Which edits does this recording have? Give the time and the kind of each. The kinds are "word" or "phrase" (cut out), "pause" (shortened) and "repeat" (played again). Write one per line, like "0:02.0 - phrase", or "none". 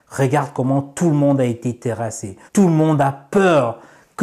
0:02.5 - pause